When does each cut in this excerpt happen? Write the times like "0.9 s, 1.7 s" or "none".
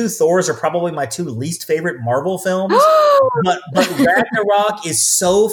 none